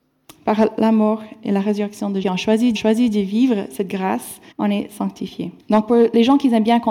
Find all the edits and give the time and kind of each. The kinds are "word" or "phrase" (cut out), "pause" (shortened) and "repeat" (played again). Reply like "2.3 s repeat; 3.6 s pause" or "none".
2.2 s phrase; 2.8 s repeat; 4.5 s pause; 5.6 s pause